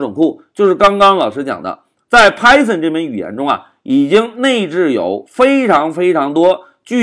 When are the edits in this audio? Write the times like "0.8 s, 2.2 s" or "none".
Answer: none